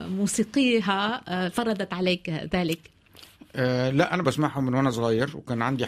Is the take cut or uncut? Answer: cut